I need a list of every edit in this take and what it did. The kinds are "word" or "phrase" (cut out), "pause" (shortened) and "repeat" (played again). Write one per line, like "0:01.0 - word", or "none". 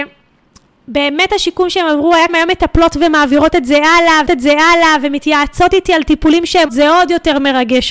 0:02.3 - phrase
0:04.3 - repeat
0:06.7 - word